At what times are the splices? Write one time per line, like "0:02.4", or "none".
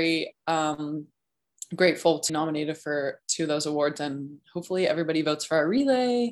0:02.3